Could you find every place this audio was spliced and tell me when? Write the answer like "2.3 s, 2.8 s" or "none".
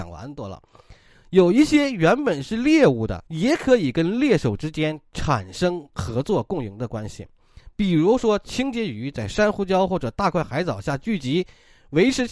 3.3 s